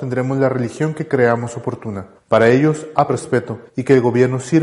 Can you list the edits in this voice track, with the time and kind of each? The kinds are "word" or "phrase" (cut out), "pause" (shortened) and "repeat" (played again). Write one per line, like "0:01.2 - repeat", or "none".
0:02.2 - pause
0:03.1 - word
0:03.7 - pause